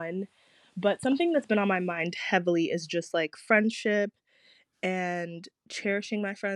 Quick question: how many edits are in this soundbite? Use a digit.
0